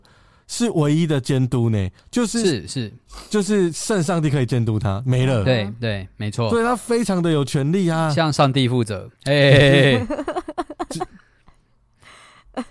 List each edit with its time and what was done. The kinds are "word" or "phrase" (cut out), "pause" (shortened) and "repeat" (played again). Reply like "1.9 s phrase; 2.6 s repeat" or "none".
9.1 s pause